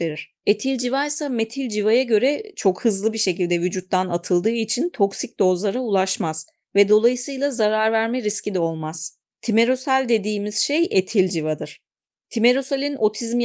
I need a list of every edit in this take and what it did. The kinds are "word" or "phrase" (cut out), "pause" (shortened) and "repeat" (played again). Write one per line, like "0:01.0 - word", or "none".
none